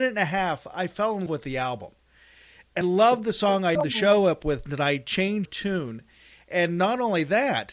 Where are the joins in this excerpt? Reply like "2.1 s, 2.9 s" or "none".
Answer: 1.3 s, 2.8 s, 3.7 s, 5.4 s